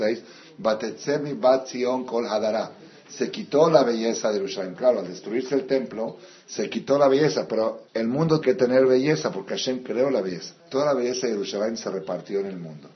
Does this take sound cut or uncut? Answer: cut